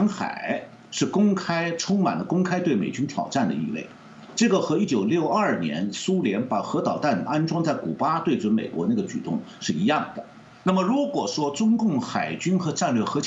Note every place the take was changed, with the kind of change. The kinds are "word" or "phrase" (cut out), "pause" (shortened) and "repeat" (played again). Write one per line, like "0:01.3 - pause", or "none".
0:10.5 - pause